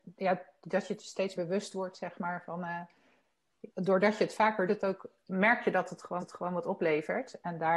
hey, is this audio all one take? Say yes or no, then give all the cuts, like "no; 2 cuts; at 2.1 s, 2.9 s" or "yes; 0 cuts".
no; 4 cuts; at 1.4 s, 3.7 s, 4.7 s, 6.2 s